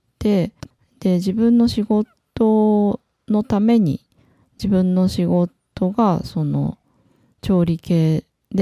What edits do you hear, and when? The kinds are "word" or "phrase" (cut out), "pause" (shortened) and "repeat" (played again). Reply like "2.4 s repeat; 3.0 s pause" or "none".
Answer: none

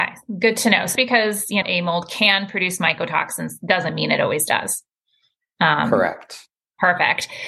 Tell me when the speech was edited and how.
0.9 s word; 1.6 s word

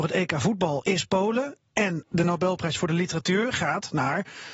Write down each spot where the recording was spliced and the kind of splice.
none

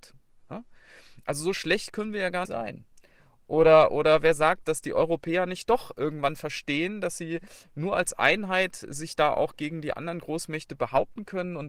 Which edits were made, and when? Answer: 2.4 s word; 4.6 s word

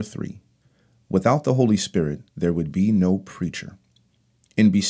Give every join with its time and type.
2.3 s pause

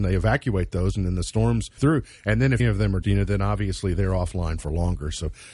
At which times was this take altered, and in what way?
1.8 s word; 2.6 s word; 3.0 s word

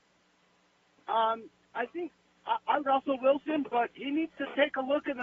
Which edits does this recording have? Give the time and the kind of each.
2.8 s word

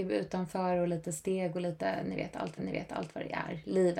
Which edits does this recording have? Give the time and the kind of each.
2.6 s repeat

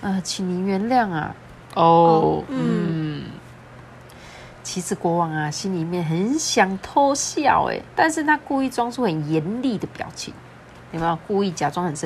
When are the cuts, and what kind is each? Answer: 1.6 s pause; 7.9 s pause

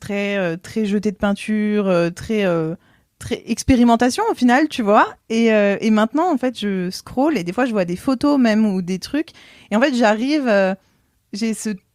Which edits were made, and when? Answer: none

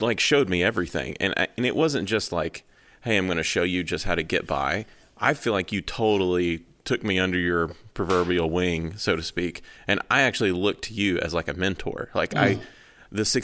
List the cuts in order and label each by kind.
none

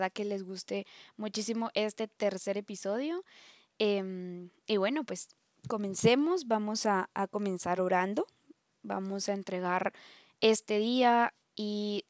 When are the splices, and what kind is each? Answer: none

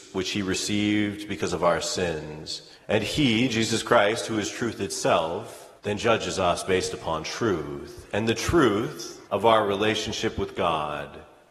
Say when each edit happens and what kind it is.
2.7 s pause; 5.8 s pause; 9.2 s pause

